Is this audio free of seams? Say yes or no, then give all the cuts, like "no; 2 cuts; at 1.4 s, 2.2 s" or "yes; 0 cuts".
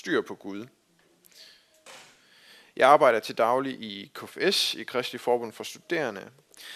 yes; 0 cuts